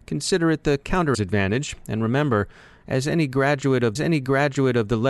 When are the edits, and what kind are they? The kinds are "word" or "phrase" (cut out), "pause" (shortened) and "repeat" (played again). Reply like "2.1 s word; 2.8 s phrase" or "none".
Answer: 1.1 s word; 4.0 s repeat